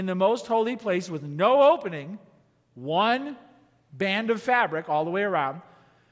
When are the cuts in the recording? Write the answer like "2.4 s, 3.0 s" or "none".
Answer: none